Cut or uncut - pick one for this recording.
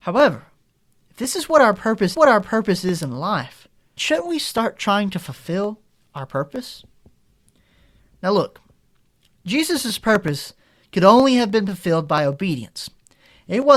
cut